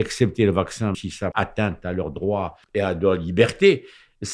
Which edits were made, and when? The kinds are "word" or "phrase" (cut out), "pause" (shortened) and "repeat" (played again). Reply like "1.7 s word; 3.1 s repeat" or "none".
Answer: 0.9 s word; 1.3 s word; 2.6 s pause